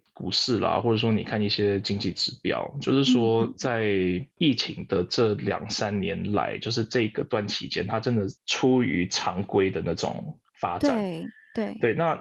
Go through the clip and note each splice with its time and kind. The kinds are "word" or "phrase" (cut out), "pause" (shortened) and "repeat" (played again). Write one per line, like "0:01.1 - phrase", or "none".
0:04.3 - pause
0:08.4 - pause
0:10.5 - pause